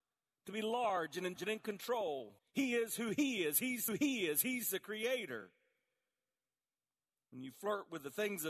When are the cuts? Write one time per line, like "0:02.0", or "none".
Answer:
0:01.4
0:02.4
0:03.9